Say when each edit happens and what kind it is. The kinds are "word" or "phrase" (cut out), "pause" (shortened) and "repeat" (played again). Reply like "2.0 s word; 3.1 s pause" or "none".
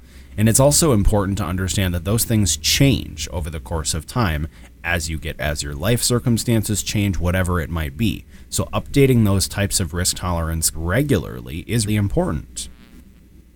5.4 s word; 10.7 s word; 11.9 s word